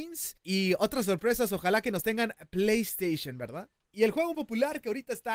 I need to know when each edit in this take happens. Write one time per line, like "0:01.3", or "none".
0:04.3